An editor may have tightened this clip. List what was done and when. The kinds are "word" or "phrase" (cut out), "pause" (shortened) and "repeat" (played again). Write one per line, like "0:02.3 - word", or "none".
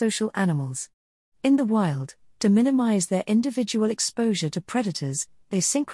none